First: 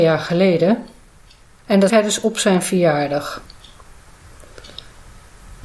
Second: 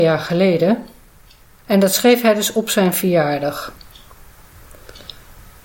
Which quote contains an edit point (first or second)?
first